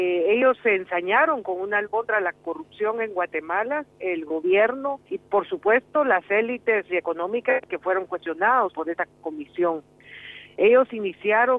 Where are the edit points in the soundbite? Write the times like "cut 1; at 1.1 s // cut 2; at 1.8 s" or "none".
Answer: cut 1; at 1.8 s // cut 2; at 5.1 s // cut 3; at 6.9 s